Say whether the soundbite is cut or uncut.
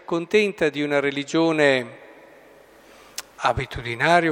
cut